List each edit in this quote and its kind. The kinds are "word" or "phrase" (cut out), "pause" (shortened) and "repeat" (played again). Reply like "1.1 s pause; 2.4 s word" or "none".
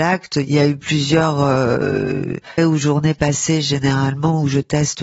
2.6 s word